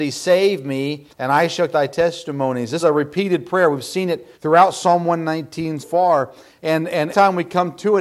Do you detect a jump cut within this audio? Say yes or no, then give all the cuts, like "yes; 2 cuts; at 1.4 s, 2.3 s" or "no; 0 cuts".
yes; 6 cuts; at 1.1 s, 1.7 s, 2.8 s, 4.3 s, 5.8 s, 7.1 s